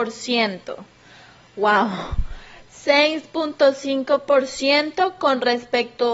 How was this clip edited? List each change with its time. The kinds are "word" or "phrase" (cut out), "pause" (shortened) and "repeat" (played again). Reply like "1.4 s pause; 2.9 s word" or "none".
none